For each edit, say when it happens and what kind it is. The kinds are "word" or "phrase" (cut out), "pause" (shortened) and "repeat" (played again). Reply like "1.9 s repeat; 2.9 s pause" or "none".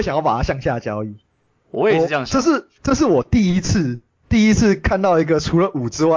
2.7 s pause